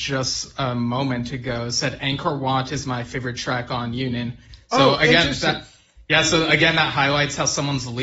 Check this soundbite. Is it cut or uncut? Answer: uncut